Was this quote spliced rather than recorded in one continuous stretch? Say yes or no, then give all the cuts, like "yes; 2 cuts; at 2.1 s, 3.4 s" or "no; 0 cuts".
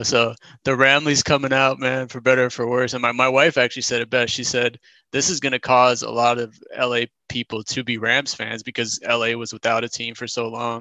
no; 0 cuts